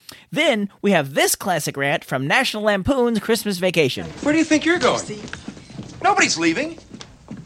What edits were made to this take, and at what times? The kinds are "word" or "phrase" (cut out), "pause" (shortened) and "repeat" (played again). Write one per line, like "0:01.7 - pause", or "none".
none